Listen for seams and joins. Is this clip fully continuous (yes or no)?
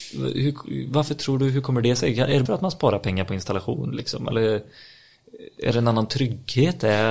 no